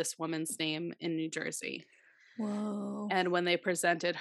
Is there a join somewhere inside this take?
no; 0 cuts

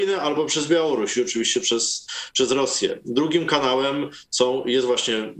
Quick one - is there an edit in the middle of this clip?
no; 0 cuts

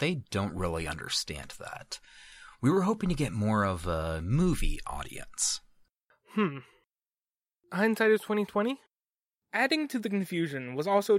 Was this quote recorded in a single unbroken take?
yes; 0 cuts

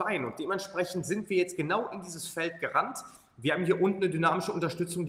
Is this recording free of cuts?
yes; 0 cuts

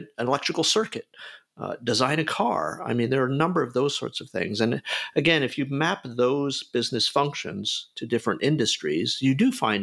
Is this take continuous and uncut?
yes; 0 cuts

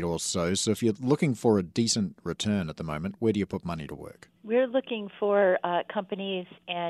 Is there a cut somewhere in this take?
yes; 1 cut; at 4.4 s

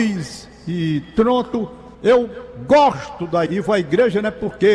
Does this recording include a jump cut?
yes; 2 cuts; at 1.9 s, 3.5 s

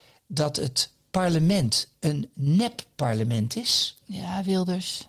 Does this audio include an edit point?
no; 0 cuts

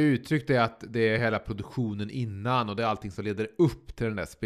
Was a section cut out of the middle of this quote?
no; 0 cuts

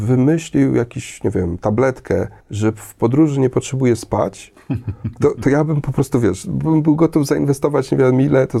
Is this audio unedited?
yes; 0 cuts

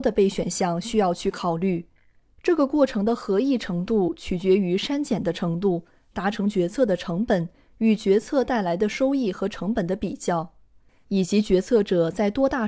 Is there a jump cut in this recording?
no; 0 cuts

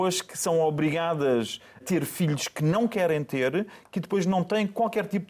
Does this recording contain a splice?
yes; 1 cut; at 1.8 s

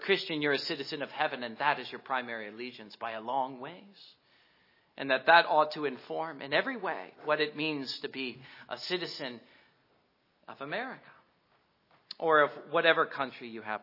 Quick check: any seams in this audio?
no; 0 cuts

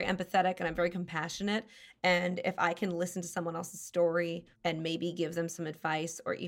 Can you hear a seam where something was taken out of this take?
yes; 1 cut; at 4.5 s

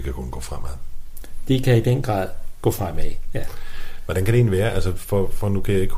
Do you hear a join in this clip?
no; 0 cuts

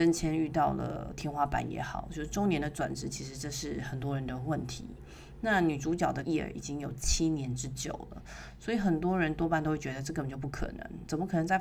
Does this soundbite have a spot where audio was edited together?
yes; 1 cut; at 6.2 s

